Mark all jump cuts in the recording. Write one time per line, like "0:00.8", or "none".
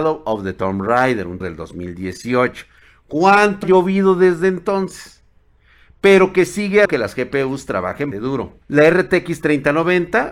0:01.4
0:03.6
0:06.9
0:08.1
0:08.6